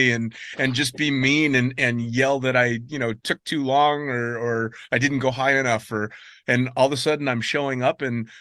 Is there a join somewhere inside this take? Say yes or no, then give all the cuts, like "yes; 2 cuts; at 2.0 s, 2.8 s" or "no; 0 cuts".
no; 0 cuts